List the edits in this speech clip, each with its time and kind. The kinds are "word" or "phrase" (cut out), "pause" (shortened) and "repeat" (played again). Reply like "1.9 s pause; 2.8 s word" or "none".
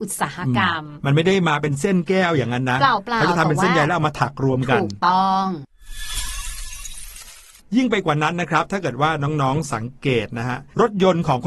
7.6 s pause